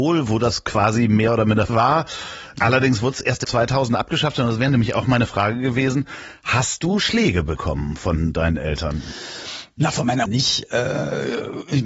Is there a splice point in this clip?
yes; 3 cuts; at 1.7 s, 3.4 s, 10.3 s

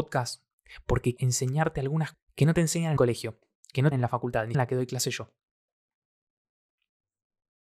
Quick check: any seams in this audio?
yes; 5 cuts; at 1.2 s, 2.1 s, 3.0 s, 3.9 s, 4.5 s

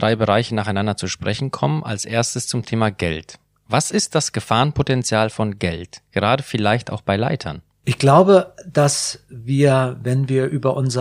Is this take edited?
no; 0 cuts

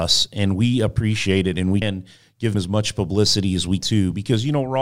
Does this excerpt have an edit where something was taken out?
yes; 3 cuts; at 1.8 s, 2.5 s, 3.8 s

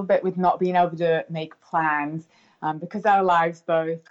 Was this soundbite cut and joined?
no; 0 cuts

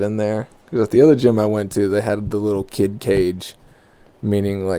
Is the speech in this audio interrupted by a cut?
no; 0 cuts

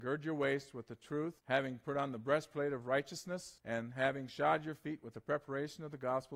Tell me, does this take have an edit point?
yes; 2 cuts; at 1.4 s, 3.6 s

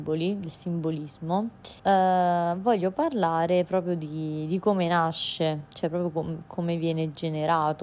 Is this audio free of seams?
no; 1 cut; at 1.8 s

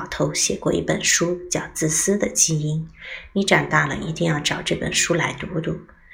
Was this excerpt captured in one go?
yes; 0 cuts

